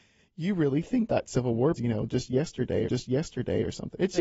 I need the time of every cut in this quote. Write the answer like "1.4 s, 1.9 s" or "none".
1.1 s, 1.8 s, 2.9 s

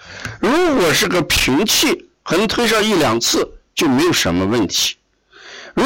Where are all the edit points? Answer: none

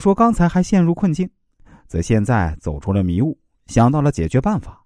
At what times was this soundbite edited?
none

